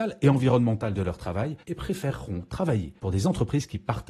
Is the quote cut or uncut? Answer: cut